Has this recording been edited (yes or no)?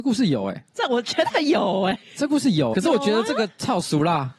yes